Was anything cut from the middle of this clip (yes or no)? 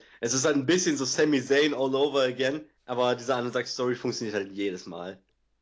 yes